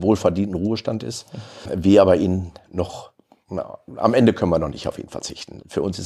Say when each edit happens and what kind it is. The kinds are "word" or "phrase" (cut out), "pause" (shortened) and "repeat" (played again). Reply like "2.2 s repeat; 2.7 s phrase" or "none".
none